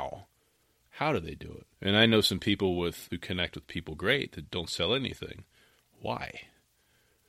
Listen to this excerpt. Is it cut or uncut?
cut